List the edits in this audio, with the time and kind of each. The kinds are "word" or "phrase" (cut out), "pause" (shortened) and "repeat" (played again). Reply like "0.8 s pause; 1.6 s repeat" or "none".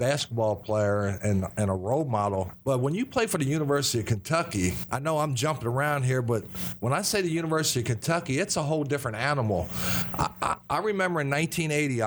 none